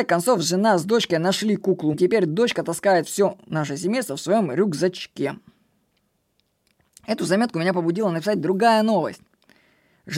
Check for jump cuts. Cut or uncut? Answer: cut